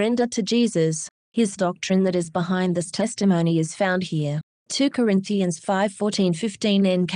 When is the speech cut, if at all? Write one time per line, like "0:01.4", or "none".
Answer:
0:01.6